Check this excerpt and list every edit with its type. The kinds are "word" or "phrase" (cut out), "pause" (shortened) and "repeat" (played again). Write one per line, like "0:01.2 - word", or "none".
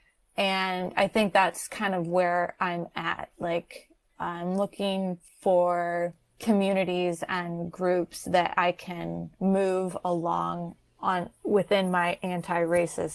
0:09.3 - pause
0:11.4 - pause